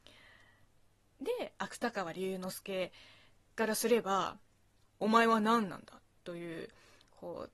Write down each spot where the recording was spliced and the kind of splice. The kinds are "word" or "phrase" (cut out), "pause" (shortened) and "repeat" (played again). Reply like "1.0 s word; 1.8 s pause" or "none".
none